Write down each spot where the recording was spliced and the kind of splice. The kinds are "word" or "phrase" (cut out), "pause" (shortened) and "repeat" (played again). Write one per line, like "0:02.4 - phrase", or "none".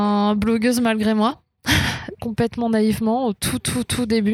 0:02.2 - word